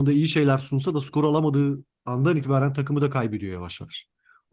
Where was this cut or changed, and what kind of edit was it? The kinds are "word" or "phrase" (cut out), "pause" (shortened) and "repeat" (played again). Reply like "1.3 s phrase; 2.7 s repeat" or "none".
none